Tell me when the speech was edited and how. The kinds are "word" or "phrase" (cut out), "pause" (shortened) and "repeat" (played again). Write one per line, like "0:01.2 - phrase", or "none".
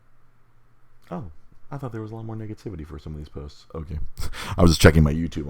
none

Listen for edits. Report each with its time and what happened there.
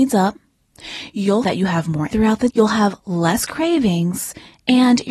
0:01.4 - word
0:02.1 - word
0:02.5 - word

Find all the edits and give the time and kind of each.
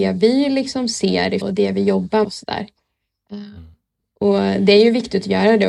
0:01.4 - word
0:02.2 - word

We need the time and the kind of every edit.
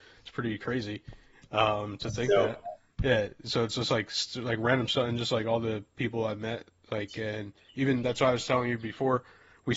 none

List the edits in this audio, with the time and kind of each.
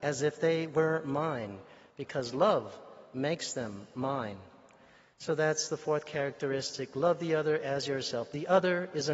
none

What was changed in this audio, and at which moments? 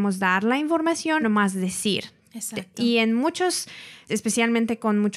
0:01.2 - word
0:04.1 - word

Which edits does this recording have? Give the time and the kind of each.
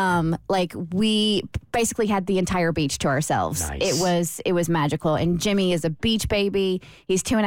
none

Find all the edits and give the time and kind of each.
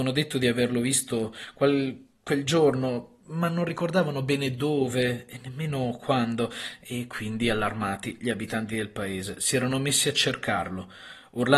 none

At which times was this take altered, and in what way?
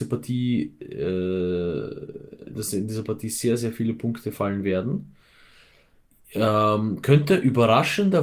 none

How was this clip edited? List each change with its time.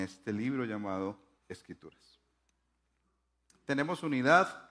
0:01.4 - word

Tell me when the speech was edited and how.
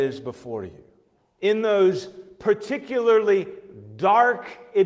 0:01.2 - pause

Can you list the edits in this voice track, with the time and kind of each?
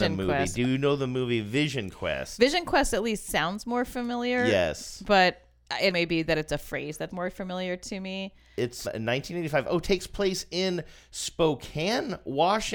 0:05.9 - word
0:07.1 - word
0:08.8 - word

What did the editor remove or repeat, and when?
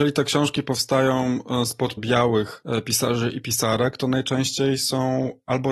0:02.0 - word

